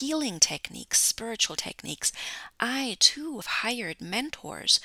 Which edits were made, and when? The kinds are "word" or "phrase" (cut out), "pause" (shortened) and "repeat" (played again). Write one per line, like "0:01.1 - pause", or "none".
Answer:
0:01.6 - word
0:03.4 - word